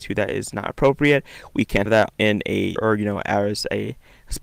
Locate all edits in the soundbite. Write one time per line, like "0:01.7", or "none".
0:01.9
0:02.2
0:02.8